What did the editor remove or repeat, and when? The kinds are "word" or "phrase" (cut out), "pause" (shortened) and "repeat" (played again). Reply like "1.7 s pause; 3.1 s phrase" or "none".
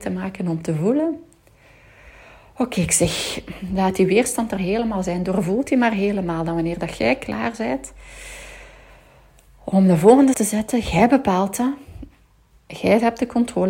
4.6 s word; 10.3 s word